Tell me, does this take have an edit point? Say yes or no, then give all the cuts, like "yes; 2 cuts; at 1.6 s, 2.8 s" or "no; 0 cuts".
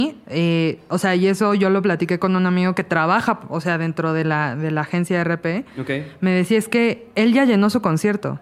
no; 0 cuts